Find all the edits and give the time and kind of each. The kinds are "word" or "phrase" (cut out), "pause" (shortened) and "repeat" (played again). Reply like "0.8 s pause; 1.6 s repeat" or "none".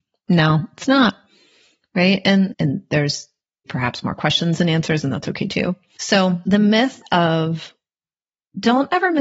2.5 s word; 3.7 s word